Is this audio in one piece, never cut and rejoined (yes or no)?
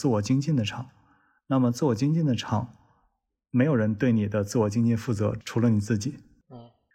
yes